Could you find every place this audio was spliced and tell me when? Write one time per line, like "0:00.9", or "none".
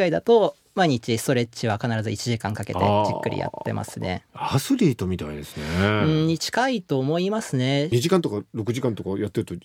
0:04.3